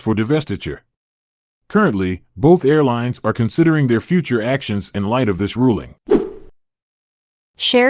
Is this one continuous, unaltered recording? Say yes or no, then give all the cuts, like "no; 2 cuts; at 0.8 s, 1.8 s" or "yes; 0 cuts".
yes; 0 cuts